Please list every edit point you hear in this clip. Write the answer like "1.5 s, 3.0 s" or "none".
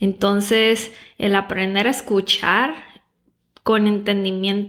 none